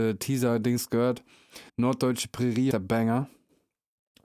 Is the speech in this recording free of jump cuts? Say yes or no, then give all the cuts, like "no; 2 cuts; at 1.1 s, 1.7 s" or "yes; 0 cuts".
no; 2 cuts; at 1.7 s, 2.7 s